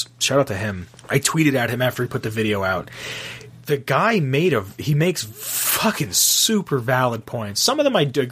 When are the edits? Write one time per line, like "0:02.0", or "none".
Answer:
0:00.9